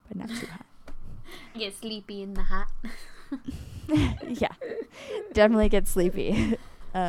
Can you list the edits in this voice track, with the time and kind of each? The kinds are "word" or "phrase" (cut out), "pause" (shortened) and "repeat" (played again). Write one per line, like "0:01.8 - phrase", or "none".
0:01.5 - word
0:05.3 - word